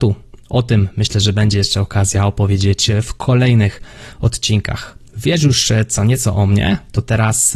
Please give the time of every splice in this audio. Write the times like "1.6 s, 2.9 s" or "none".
5.1 s